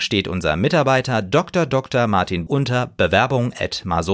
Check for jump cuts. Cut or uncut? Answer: cut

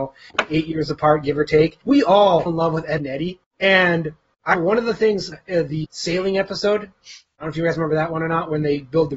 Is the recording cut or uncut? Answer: cut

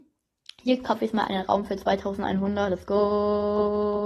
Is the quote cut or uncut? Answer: uncut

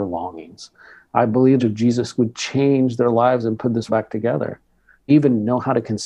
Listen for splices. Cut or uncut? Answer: cut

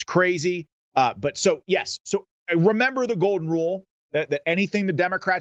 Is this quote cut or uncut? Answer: uncut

